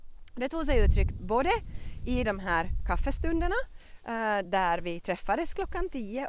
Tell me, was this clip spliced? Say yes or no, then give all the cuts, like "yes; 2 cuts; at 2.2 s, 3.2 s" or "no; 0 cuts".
no; 0 cuts